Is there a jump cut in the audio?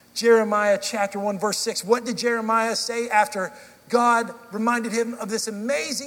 no; 0 cuts

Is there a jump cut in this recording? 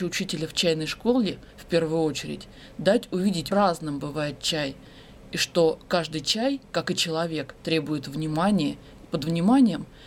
yes; 5 cuts; at 1.5 s, 3.5 s, 6.6 s, 7.6 s, 9.0 s

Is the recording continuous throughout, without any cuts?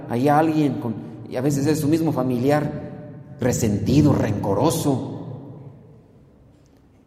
yes; 0 cuts

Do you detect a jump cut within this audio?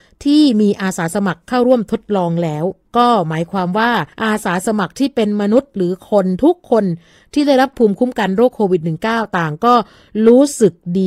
yes; 1 cut; at 4.1 s

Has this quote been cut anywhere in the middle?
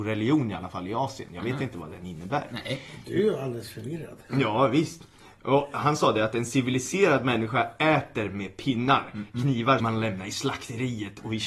yes; 1 cut; at 9.8 s

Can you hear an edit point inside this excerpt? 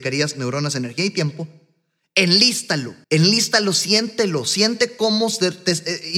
yes; 1 cut; at 3.0 s

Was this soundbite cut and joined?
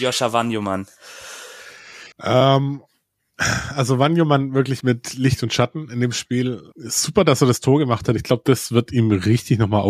yes; 3 cuts; at 2.1 s, 4.8 s, 6.7 s

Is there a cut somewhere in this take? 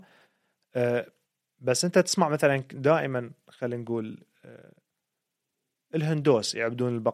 no; 0 cuts

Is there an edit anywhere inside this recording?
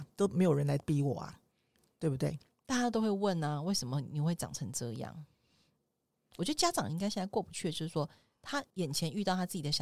yes; 1 cut; at 8.7 s

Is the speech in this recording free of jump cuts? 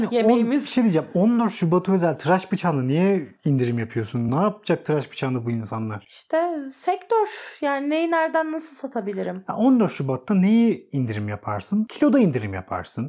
yes; 0 cuts

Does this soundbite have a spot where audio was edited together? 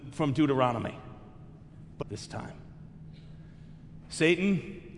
yes; 1 cut; at 2.0 s

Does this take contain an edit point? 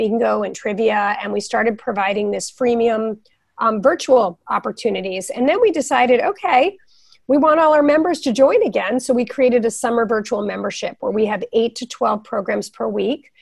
no; 0 cuts

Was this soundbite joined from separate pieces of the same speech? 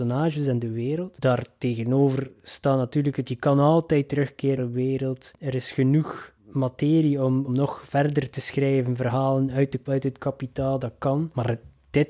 yes; 5 cuts; at 3.3 s, 4.6 s, 6.4 s, 7.5 s, 9.9 s

